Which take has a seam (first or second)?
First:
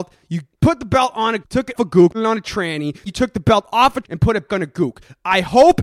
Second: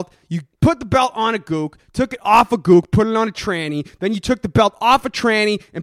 first